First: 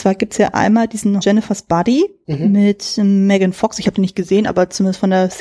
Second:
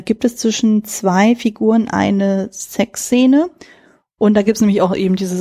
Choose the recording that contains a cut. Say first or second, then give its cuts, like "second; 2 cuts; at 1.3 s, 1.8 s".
first; 1 cut; at 1.2 s